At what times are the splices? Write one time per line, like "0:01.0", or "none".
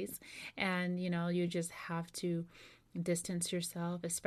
none